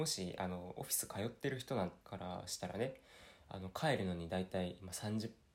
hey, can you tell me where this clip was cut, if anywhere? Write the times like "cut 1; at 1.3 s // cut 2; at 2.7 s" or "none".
cut 1; at 2.0 s